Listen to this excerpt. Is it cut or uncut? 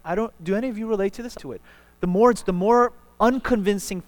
cut